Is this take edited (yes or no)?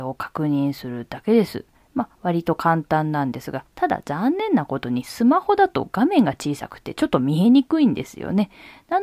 yes